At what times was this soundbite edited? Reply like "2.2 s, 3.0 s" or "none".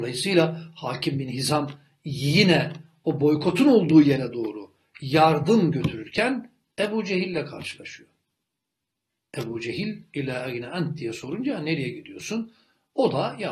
none